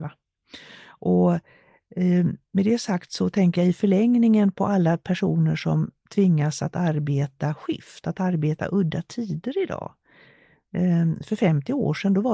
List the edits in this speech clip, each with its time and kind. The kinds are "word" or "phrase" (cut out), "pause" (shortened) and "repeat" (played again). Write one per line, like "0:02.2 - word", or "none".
0:02.5 - pause